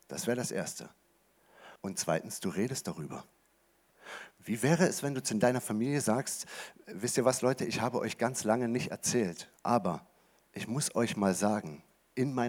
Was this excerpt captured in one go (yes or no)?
no